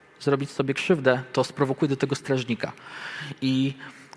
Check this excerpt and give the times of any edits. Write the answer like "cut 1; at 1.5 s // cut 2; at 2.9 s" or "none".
none